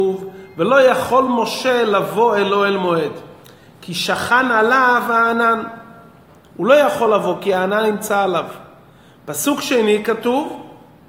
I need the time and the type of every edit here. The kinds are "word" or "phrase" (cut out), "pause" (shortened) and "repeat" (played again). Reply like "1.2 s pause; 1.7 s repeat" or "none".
none